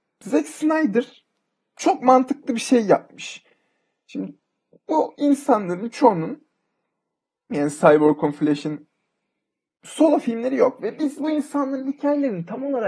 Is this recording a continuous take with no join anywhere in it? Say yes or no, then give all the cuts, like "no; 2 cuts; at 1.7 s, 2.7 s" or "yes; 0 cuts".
yes; 0 cuts